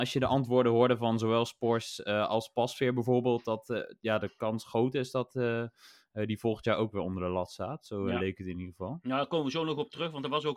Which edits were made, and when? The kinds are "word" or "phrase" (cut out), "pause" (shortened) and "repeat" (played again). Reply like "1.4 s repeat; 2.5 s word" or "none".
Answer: none